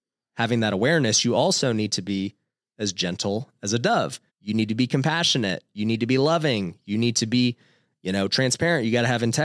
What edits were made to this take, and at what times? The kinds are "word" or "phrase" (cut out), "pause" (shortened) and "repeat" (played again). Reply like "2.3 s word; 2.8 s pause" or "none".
4.3 s pause